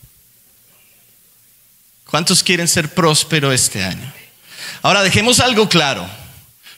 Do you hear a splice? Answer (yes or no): no